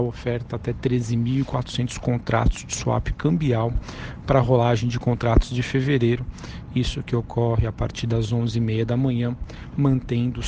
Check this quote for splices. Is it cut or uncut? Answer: uncut